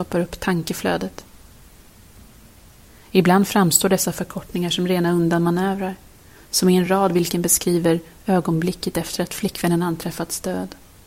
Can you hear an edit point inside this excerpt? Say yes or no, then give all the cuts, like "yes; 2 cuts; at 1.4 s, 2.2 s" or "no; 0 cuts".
no; 0 cuts